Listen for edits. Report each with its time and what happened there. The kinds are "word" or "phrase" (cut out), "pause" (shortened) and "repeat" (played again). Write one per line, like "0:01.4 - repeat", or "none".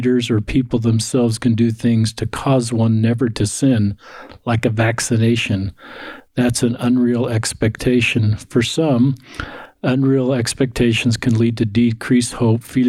none